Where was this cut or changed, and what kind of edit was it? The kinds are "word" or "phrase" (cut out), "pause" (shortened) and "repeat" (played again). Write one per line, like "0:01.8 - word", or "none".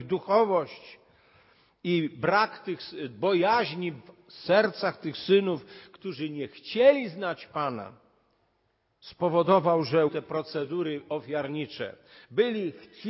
0:10.1 - word